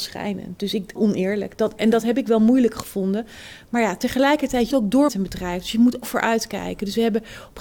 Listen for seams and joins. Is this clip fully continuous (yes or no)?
no